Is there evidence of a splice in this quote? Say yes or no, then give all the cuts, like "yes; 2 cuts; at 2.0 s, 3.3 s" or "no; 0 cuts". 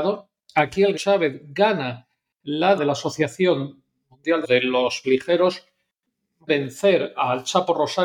yes; 5 cuts; at 0.9 s, 2.8 s, 4.4 s, 5.0 s, 6.5 s